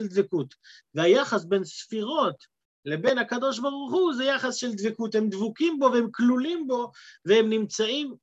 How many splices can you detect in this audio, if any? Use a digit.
0